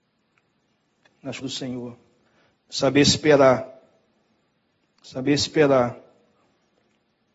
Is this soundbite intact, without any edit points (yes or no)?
no